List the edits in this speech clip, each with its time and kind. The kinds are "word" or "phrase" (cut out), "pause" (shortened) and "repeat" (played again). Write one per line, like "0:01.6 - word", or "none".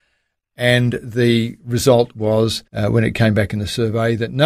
0:02.7 - pause